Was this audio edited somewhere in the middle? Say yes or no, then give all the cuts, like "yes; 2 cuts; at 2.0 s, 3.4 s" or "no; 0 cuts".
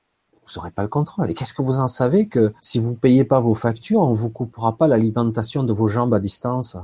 yes; 1 cut; at 2.6 s